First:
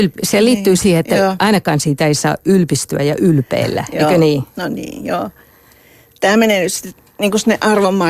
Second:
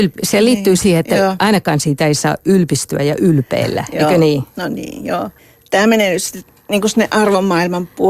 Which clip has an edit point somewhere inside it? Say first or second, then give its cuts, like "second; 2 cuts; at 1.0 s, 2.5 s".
second; 1 cut; at 5.4 s